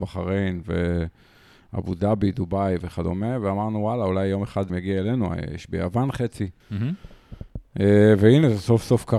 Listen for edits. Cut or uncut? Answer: cut